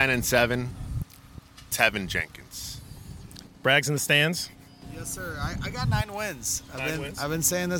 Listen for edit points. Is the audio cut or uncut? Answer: cut